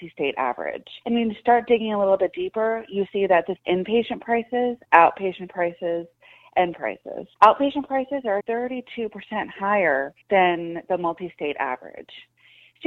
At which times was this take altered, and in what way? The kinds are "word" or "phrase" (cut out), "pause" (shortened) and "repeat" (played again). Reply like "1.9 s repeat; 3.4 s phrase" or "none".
1.0 s pause; 3.6 s phrase; 6.7 s word; 7.3 s pause; 8.4 s word; 10.2 s pause